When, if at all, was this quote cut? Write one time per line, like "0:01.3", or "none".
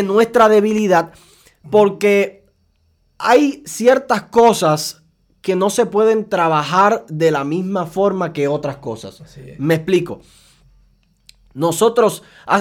none